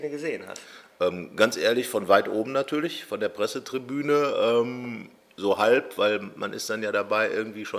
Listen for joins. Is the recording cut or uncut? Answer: uncut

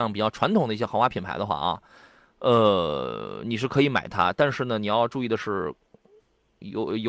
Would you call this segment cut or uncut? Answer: uncut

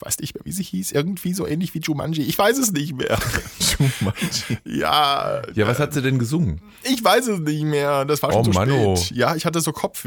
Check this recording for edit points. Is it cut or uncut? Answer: uncut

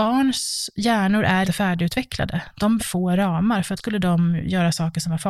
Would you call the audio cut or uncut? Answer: cut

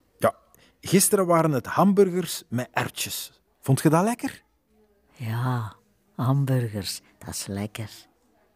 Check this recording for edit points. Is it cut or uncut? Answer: uncut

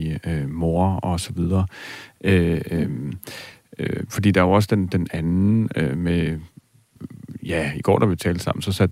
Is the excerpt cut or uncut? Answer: uncut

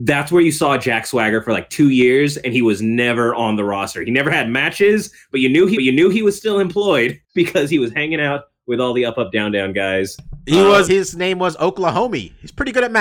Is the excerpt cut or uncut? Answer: cut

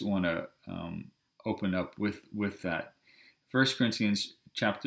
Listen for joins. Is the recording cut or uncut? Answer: uncut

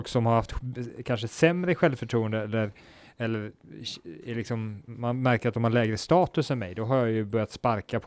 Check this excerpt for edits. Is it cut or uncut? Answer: uncut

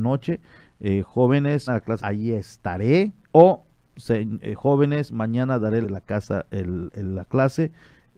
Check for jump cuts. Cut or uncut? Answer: cut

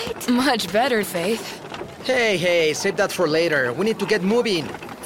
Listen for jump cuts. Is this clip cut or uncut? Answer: cut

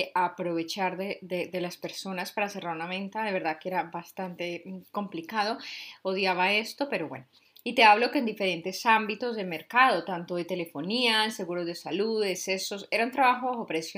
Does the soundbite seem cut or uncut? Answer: uncut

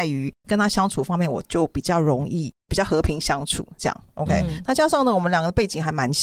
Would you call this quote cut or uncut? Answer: uncut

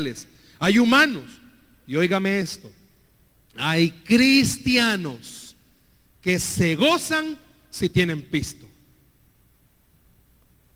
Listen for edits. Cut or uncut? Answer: uncut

